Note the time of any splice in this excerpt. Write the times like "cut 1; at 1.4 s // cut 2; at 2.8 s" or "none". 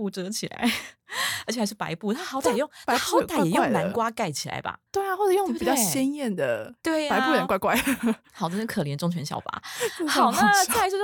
cut 1; at 4.9 s // cut 2; at 6.8 s